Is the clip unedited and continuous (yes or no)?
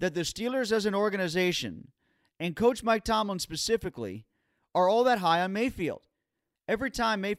yes